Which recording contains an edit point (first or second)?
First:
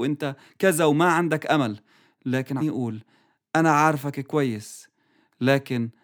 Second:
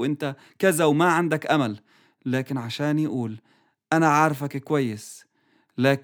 first